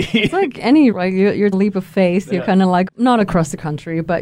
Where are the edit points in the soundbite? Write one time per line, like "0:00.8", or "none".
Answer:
0:00.9
0:01.5
0:02.9

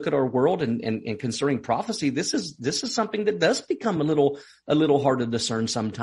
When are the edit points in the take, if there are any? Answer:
none

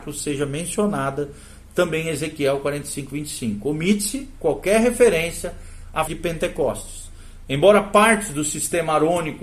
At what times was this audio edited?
0:06.1

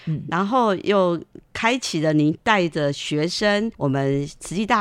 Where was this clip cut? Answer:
0:03.7

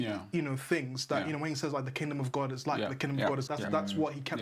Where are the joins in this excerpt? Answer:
0:03.5

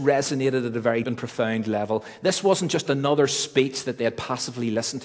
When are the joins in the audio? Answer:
0:01.0

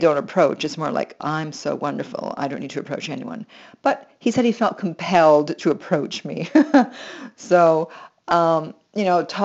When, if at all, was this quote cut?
0:01.2

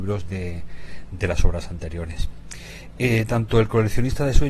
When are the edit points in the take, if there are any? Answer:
none

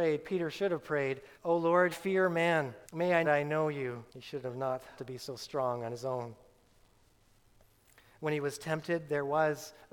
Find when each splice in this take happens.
0:01.3
0:01.9
0:02.8
0:03.2
0:04.1
0:05.0

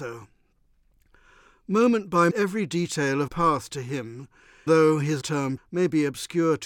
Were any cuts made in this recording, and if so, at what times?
0:02.3
0:03.3
0:04.7
0:05.2
0:05.6

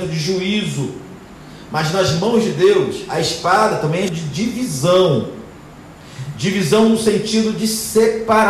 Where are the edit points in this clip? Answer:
0:04.1

